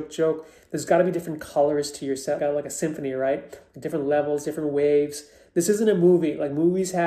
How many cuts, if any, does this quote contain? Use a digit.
1